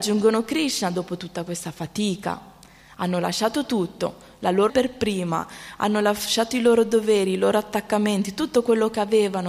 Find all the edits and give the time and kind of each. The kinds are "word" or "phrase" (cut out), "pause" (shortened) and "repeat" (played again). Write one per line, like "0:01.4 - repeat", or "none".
0:04.7 - word